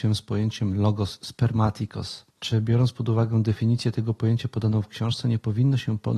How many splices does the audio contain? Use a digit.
1